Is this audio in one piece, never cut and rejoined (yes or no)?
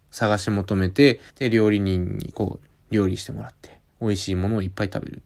no